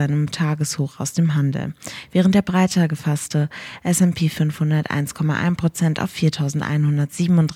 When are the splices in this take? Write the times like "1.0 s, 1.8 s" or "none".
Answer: none